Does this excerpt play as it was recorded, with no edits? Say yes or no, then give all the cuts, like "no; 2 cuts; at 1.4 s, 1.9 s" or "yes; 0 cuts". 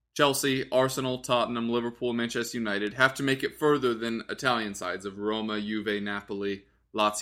yes; 0 cuts